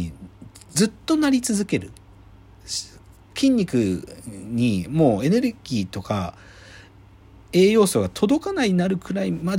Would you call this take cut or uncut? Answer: uncut